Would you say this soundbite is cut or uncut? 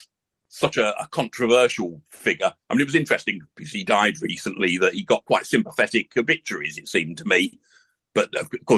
uncut